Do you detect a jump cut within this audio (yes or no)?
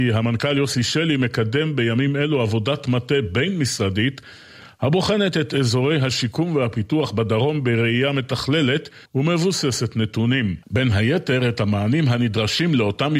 yes